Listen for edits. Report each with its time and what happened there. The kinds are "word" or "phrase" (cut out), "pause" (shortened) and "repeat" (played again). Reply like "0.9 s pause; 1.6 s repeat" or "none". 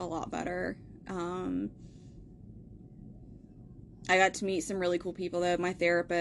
none